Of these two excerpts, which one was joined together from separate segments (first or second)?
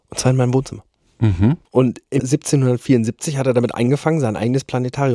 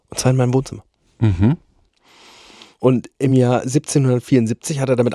first